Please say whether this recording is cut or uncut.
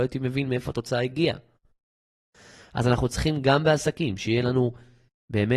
uncut